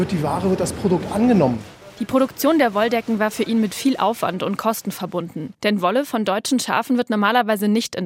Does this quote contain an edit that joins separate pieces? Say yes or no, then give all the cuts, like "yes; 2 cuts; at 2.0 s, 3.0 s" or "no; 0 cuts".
yes; 1 cut; at 5.6 s